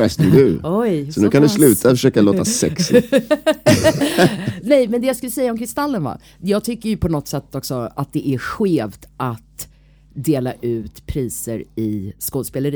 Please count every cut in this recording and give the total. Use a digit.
0